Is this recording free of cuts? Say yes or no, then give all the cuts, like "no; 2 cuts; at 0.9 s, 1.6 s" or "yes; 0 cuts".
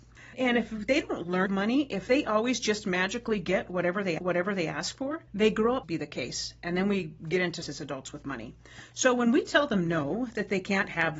no; 5 cuts; at 1.5 s, 4.2 s, 5.3 s, 5.8 s, 7.6 s